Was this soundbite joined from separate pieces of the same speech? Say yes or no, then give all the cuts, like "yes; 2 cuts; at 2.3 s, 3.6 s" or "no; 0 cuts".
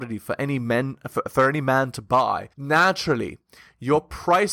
yes; 1 cut; at 2.5 s